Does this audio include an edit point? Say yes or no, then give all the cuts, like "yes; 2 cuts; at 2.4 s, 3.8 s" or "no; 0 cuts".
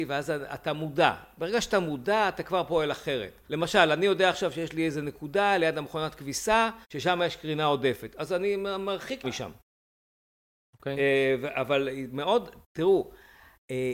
yes; 3 cuts; at 3.4 s, 6.8 s, 9.2 s